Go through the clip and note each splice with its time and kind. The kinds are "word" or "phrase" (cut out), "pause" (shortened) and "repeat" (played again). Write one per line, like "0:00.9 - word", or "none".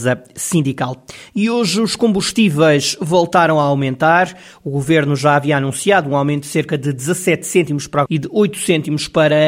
0:08.1 - word

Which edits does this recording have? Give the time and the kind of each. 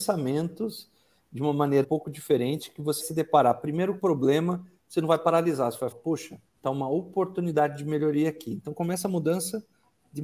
0:01.8 - word
0:03.0 - word
0:04.0 - phrase
0:05.9 - word
0:06.5 - pause

